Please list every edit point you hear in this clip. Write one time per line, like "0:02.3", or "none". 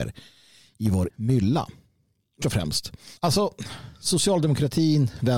0:01.1
0:02.4
0:03.2